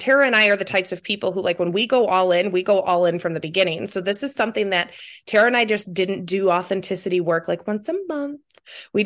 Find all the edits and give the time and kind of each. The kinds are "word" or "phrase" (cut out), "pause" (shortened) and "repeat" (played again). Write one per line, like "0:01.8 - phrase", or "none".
none